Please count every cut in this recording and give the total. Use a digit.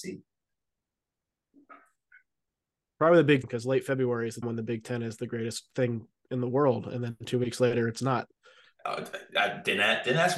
2